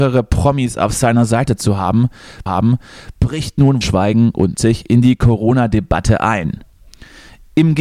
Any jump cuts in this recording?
yes; 3 cuts; at 2.5 s, 3.8 s, 4.5 s

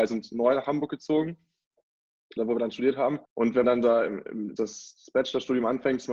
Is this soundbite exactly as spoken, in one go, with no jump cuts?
no; 4 cuts; at 2.4 s, 3.3 s, 3.6 s, 4.6 s

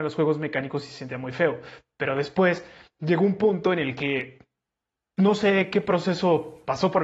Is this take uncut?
yes; 0 cuts

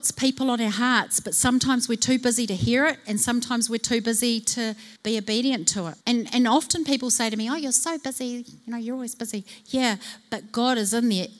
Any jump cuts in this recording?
yes; 2 cuts; at 5.0 s, 6.0 s

